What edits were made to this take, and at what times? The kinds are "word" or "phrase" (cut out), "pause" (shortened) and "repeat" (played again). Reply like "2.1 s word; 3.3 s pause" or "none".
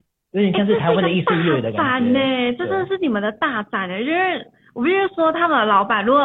none